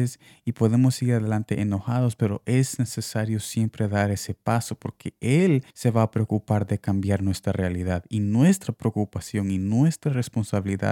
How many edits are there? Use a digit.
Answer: 1